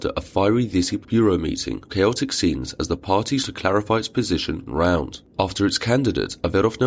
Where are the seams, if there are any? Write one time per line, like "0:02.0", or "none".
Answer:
0:01.0
0:01.9
0:03.4
0:04.7